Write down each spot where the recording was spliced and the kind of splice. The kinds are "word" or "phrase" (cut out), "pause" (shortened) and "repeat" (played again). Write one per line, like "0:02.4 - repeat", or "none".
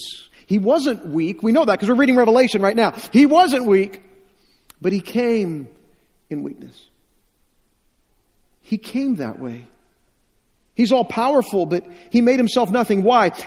none